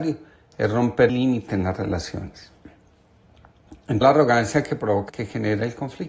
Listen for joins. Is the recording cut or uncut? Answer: cut